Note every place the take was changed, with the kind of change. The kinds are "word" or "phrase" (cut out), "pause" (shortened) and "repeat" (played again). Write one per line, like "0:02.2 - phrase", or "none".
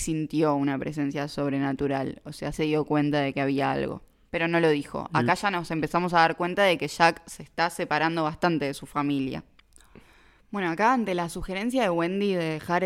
0:02.5 - word